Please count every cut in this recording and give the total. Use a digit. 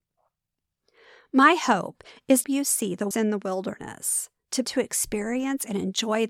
3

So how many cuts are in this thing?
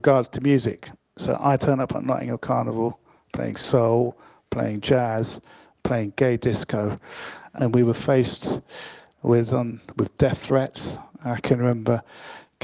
0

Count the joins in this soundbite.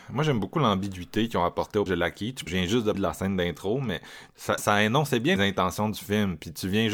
5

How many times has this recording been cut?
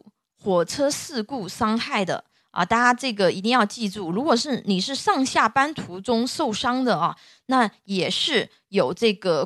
0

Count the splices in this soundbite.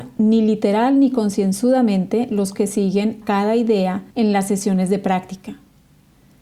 3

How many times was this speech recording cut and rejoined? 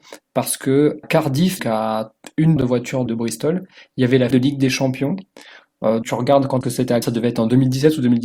8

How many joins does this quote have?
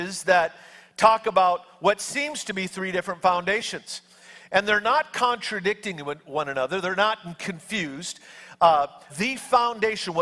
1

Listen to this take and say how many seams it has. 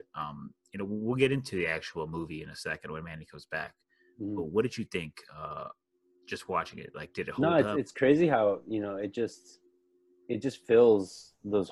0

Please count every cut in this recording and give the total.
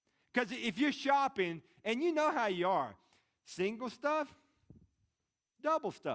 0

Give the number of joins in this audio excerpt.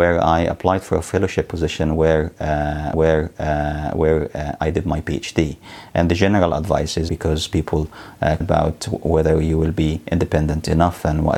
3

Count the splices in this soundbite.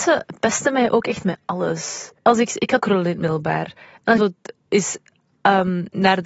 3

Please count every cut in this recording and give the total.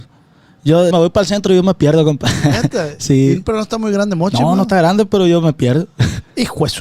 1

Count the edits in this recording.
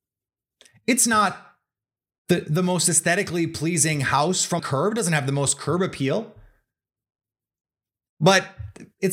1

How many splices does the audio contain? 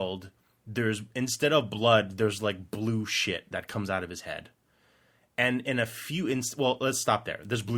0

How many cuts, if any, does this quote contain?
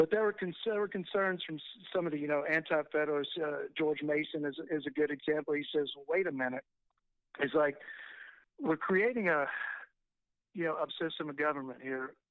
1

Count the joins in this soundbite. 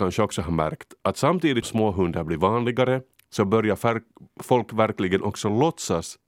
2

